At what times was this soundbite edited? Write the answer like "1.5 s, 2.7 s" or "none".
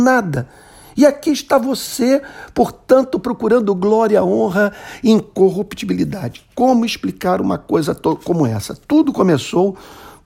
none